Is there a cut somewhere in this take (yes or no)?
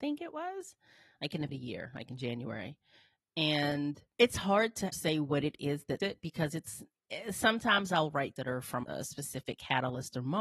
yes